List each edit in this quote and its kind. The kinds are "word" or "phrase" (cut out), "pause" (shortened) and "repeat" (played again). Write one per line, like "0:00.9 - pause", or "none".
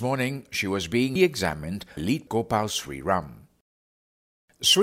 0:01.2 - word
0:02.0 - word
0:02.3 - word